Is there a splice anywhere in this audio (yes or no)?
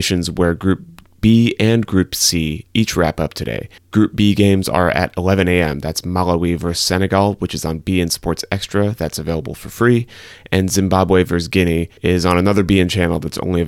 yes